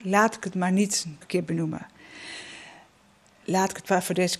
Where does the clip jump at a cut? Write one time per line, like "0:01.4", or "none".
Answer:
0:01.2